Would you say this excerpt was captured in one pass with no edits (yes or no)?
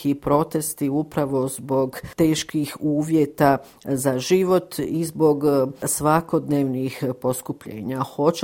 yes